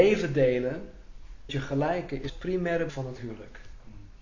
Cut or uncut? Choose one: cut